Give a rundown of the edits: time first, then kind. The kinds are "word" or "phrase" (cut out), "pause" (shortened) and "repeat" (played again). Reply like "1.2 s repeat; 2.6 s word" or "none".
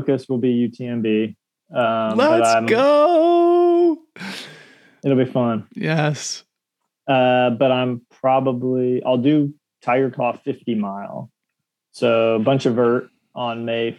none